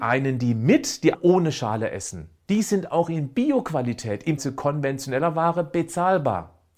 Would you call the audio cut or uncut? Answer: cut